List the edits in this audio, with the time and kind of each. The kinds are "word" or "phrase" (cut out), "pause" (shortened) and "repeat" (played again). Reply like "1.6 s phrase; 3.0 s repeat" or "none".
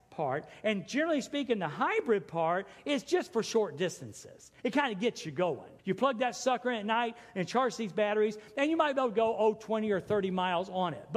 5.8 s pause